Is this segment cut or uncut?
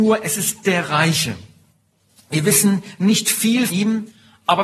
cut